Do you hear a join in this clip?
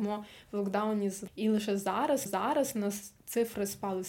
yes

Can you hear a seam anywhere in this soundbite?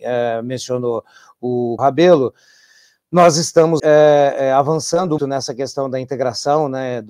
yes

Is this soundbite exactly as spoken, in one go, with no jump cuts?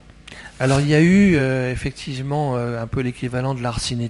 yes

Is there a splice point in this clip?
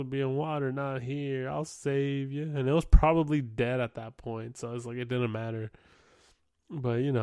no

